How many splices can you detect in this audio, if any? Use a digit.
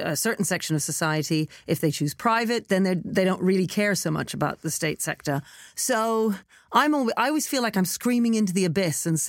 0